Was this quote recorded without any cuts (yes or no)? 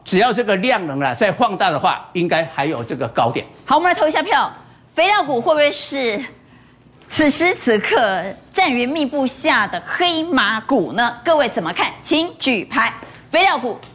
yes